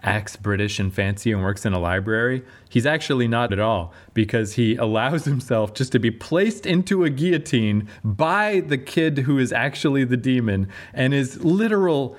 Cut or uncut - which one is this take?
cut